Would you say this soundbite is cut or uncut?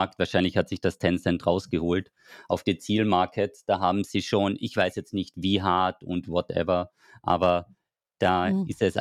uncut